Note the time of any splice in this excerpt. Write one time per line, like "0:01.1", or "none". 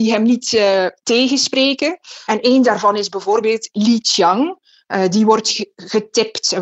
none